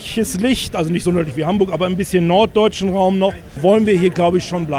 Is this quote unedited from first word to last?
yes; 0 cuts

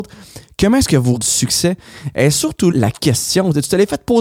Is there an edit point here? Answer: yes; 2 cuts; at 1.2 s, 2.7 s

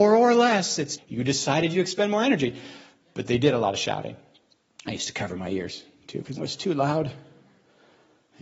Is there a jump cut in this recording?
yes; 3 cuts; at 1.0 s, 1.7 s, 6.4 s

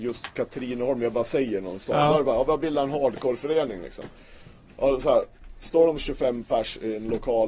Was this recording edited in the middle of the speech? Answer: no; 0 cuts

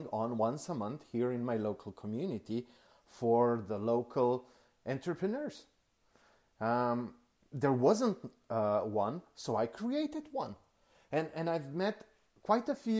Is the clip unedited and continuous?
yes; 0 cuts

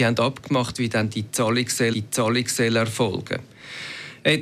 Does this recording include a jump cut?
yes; 1 cut; at 1.9 s

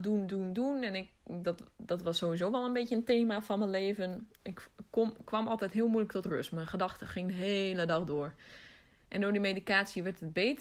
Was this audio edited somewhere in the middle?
no; 0 cuts

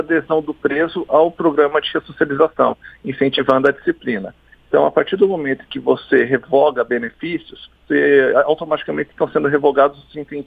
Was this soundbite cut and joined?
yes; 1 cut; at 7.8 s

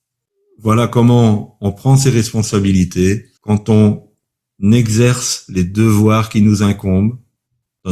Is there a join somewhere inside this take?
yes; 1 cut; at 3.4 s

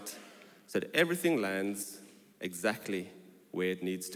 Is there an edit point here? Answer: no; 0 cuts

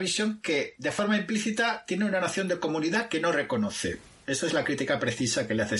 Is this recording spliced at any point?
no; 0 cuts

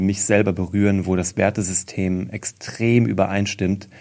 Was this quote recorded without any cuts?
yes; 0 cuts

